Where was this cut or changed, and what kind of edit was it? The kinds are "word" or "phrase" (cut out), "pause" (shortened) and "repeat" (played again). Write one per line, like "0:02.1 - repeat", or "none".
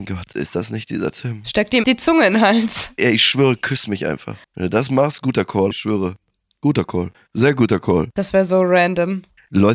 0:01.8 - word
0:04.4 - pause
0:05.7 - word
0:07.1 - pause